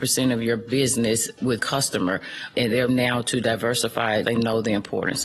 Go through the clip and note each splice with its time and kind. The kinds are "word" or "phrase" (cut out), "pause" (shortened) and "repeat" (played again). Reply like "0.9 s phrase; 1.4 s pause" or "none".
1.6 s word; 2.9 s word; 4.2 s word